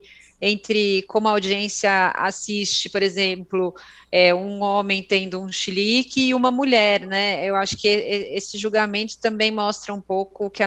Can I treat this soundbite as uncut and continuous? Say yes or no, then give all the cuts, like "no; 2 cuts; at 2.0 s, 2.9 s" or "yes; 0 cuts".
yes; 0 cuts